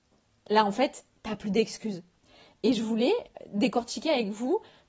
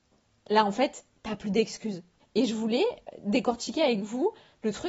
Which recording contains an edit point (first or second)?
second